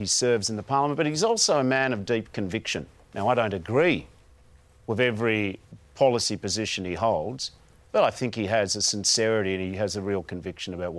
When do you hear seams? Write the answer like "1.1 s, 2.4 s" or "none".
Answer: none

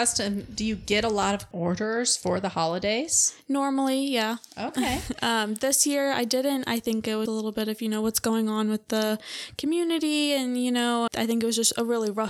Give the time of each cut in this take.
1.5 s, 7.3 s, 11.1 s

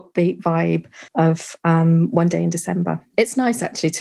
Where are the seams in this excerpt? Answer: 1.1 s

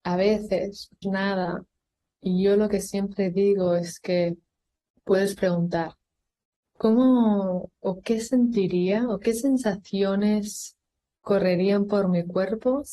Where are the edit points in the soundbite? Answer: 1.0 s

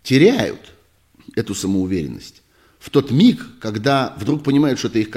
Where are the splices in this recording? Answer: none

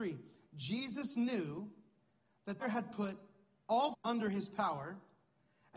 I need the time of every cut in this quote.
2.6 s, 3.9 s

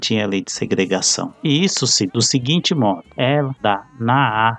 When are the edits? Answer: 2.1 s, 3.6 s

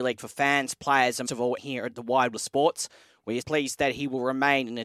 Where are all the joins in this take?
1.3 s, 1.6 s, 2.3 s, 3.4 s

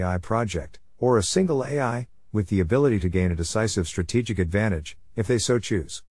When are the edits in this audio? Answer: none

